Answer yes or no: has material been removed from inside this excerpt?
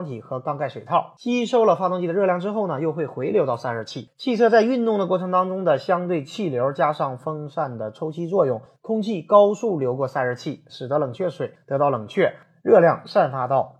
no